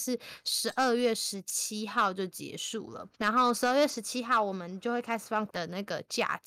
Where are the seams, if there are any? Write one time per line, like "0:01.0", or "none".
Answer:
0:03.1
0:05.5